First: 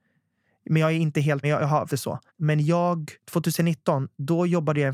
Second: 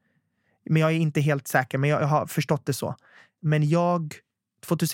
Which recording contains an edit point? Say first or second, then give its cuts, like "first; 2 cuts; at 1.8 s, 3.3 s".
first; 4 cuts; at 1.4 s, 1.9 s, 2.3 s, 3.2 s